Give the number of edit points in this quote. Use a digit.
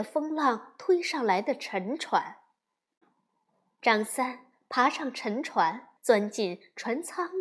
1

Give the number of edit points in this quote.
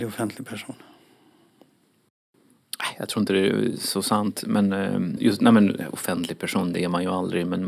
1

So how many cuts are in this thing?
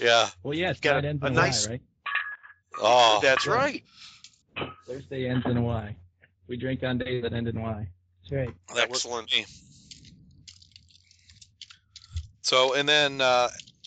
0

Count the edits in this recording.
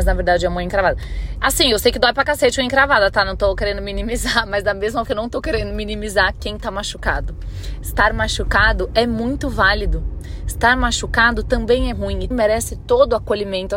3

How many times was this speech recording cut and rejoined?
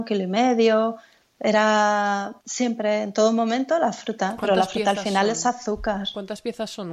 1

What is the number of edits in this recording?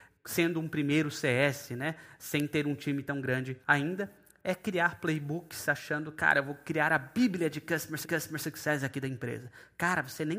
2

